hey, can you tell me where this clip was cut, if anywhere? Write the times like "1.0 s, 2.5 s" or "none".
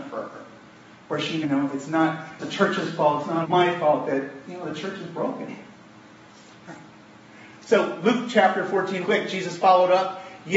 1.4 s, 2.4 s, 3.4 s, 9.0 s